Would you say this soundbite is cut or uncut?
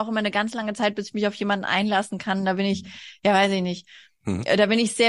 uncut